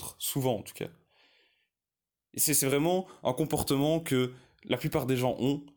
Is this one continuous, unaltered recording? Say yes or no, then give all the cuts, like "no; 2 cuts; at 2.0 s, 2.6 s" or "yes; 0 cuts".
yes; 0 cuts